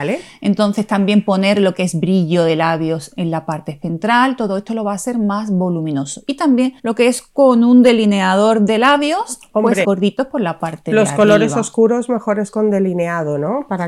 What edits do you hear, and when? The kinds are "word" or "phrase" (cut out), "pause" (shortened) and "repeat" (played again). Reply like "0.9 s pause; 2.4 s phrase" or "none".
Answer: 6.8 s pause; 9.8 s phrase